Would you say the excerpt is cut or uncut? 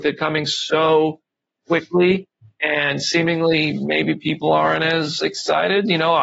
uncut